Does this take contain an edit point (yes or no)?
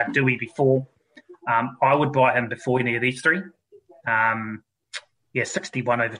no